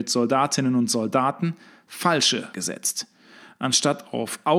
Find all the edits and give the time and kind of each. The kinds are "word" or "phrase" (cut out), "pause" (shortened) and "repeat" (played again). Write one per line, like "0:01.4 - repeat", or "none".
0:02.5 - word

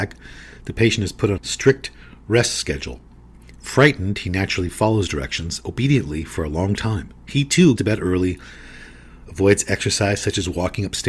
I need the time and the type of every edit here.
0:01.4 - word
0:07.8 - word

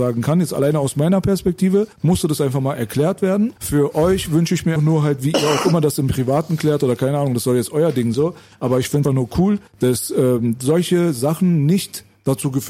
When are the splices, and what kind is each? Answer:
0:01.9 - pause
0:03.6 - pause
0:04.8 - word
0:08.1 - word
0:09.0 - word
0:09.7 - pause

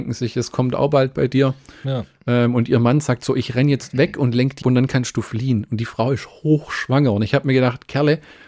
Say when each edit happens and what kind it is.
0:04.6 - word

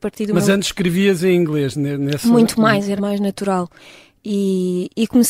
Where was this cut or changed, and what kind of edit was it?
0:03.0 - word

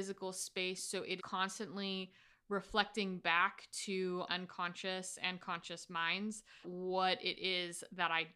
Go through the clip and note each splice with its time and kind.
0:01.2 - word
0:04.3 - word
0:06.6 - word

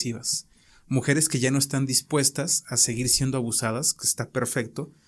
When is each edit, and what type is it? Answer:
none

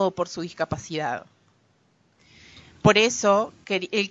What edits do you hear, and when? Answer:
none

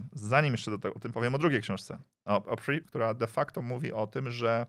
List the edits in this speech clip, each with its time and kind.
0:01.1 - word
0:02.8 - phrase

